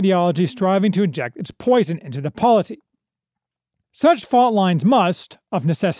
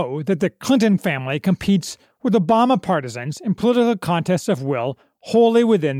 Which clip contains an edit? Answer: second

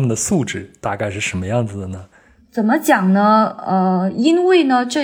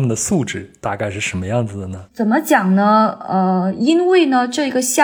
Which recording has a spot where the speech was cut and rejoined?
second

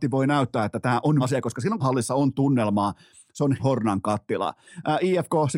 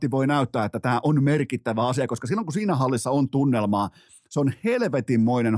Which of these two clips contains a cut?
first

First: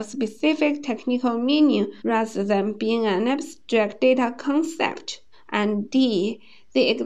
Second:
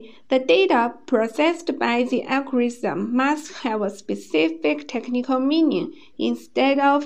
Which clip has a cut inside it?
first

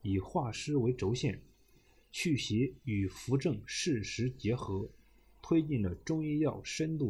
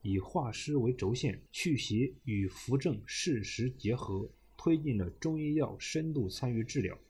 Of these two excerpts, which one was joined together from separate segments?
second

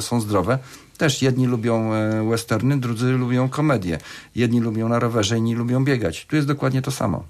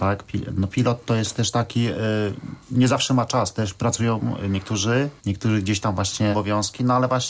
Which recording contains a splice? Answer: second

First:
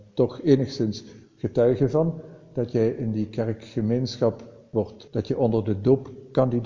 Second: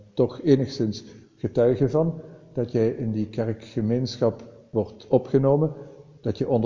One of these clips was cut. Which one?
first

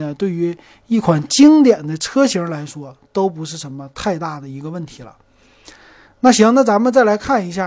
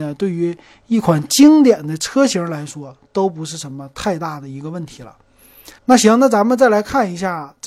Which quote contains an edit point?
second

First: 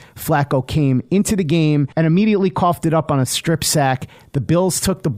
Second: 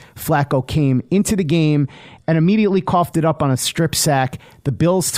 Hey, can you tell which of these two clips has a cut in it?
first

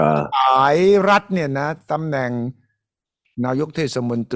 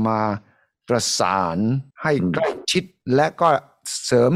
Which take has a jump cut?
second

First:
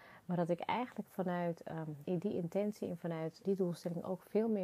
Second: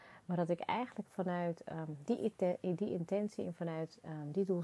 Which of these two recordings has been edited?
first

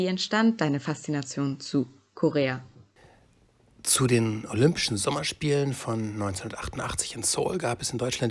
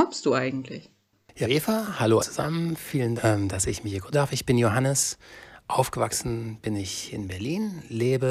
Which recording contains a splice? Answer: second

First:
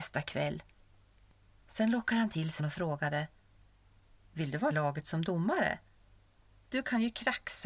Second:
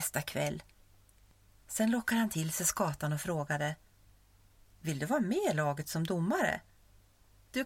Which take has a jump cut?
first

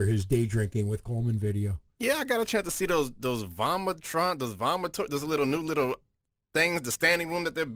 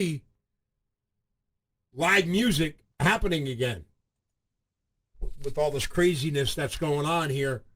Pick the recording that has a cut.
second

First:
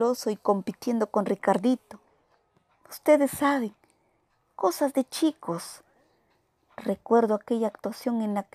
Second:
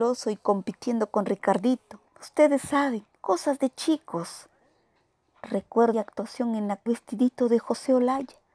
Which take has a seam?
second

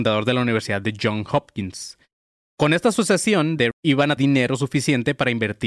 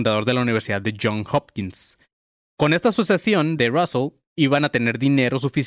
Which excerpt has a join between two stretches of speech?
first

